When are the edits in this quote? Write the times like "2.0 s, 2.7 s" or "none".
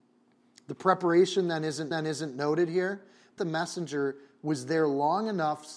1.9 s, 3.4 s